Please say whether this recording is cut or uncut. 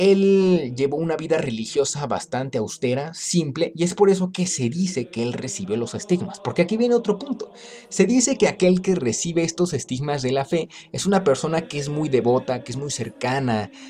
uncut